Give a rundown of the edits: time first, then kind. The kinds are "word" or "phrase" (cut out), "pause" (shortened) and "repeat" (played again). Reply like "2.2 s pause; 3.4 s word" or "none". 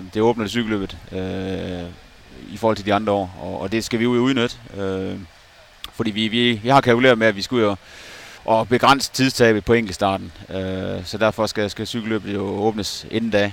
8.4 s pause